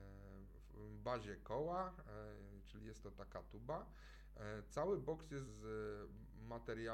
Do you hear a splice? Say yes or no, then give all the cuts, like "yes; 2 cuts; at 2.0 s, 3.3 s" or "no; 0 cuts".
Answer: yes; 1 cut; at 5.5 s